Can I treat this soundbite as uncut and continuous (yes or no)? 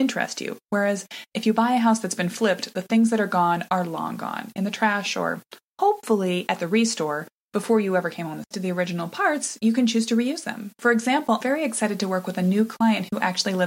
no